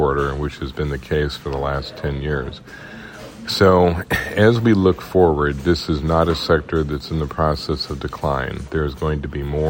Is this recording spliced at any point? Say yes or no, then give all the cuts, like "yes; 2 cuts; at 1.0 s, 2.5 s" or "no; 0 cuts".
no; 0 cuts